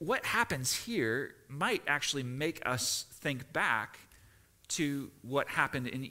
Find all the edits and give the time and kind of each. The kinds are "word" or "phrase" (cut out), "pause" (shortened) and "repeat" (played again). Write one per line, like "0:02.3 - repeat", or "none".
none